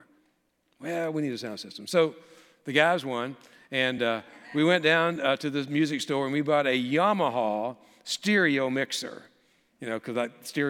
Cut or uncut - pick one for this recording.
uncut